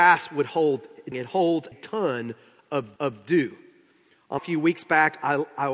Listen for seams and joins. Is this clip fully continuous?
no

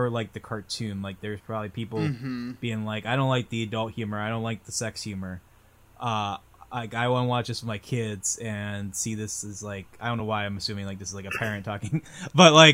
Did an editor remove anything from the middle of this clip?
no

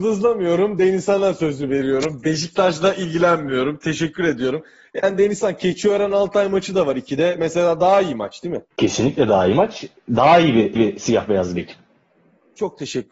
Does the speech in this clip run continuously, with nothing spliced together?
no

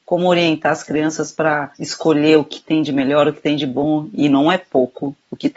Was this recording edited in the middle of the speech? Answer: yes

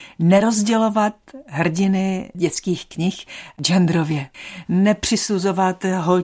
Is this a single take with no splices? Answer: yes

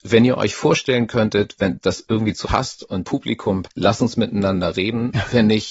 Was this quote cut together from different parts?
yes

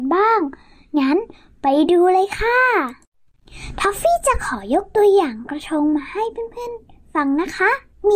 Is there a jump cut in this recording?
no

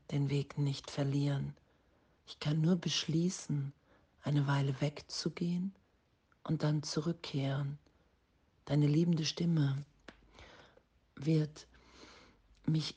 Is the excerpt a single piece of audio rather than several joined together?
yes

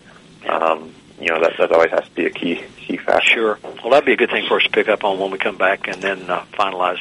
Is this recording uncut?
no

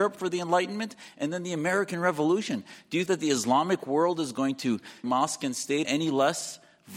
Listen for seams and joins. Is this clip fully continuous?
no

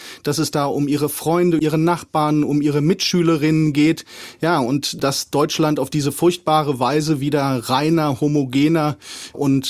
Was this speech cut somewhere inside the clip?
yes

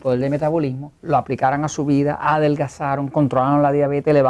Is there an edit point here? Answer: yes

